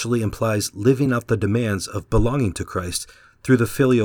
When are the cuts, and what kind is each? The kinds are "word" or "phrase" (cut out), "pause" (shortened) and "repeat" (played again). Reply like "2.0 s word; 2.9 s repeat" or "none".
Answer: none